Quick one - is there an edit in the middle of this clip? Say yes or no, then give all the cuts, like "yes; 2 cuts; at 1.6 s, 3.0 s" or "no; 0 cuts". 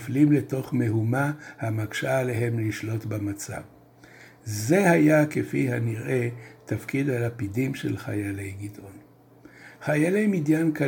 no; 0 cuts